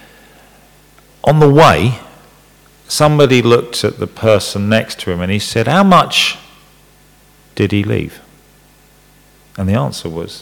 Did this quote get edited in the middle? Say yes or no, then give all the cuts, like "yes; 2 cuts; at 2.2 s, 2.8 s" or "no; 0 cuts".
no; 0 cuts